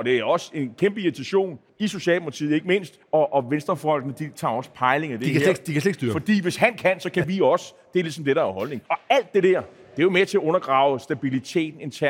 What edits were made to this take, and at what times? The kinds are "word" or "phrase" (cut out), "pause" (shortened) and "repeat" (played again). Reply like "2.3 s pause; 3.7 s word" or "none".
1.7 s pause; 3.0 s pause; 8.9 s pause